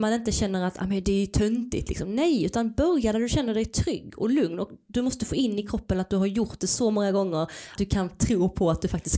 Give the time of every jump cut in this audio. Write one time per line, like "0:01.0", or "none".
0:07.8